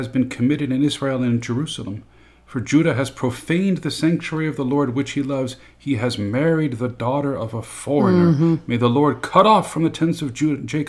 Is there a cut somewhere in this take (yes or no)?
no